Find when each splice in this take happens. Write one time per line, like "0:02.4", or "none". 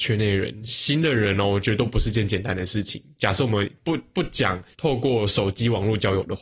0:04.7